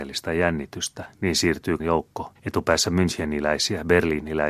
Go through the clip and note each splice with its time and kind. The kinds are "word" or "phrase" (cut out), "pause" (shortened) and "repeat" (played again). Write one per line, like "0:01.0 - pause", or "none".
0:01.1 - pause
0:01.8 - word
0:02.3 - pause